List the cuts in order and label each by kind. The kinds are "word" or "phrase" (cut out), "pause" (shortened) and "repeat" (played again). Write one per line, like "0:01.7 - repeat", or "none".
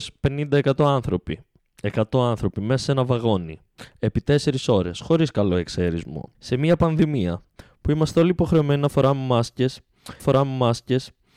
0:06.3 - pause
0:10.2 - repeat